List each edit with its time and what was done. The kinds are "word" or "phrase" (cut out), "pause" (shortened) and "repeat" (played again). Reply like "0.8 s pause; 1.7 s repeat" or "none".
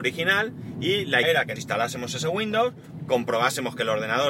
1.2 s word; 1.6 s word